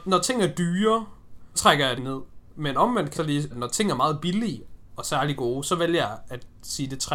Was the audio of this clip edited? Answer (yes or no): yes